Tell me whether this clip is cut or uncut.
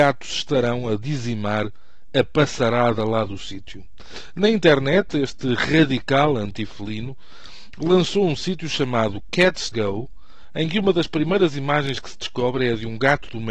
cut